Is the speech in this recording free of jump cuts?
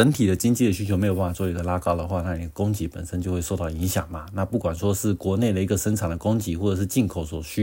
yes; 0 cuts

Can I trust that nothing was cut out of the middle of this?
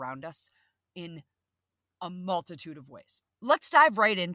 no; 1 cut; at 3.3 s

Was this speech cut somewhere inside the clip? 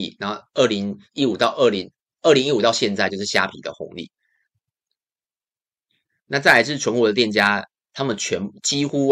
no; 0 cuts

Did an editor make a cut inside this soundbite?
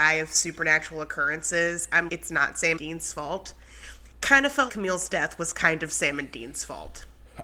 yes; 3 cuts; at 2.1 s, 2.8 s, 4.7 s

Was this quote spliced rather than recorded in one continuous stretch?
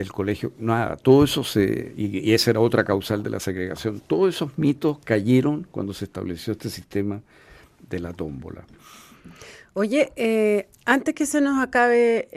no; 0 cuts

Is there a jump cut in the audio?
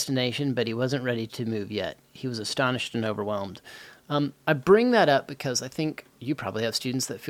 yes; 1 cut; at 6.1 s

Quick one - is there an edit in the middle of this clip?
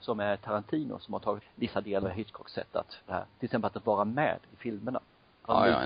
yes; 3 cuts; at 1.4 s, 2.0 s, 3.1 s

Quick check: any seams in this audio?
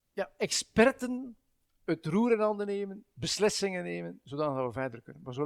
no; 0 cuts

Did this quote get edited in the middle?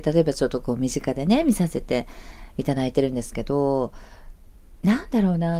no; 0 cuts

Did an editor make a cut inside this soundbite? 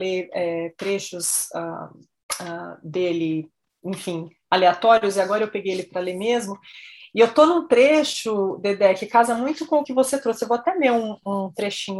no; 0 cuts

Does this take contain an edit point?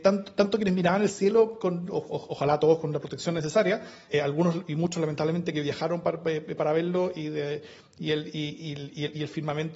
yes; 1 cut; at 4.1 s

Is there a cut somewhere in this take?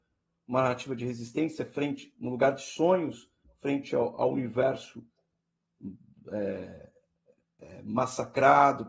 no; 0 cuts

